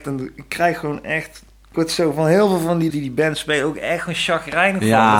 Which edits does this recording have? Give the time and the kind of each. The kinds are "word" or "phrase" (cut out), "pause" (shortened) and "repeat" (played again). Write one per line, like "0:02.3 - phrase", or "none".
0:01.7 - word
0:02.9 - word